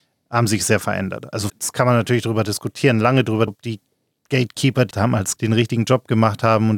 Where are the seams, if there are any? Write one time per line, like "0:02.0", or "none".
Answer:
0:01.5
0:03.5
0:04.9
0:05.4